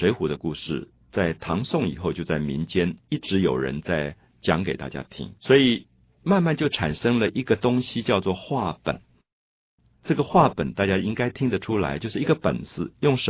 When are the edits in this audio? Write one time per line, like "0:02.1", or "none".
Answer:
0:05.4